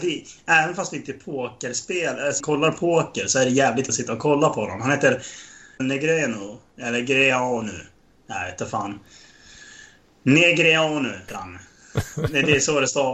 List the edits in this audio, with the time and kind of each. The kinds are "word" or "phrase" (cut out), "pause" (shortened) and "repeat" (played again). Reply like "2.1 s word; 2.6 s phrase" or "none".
2.4 s word; 3.9 s word; 5.8 s word; 11.3 s word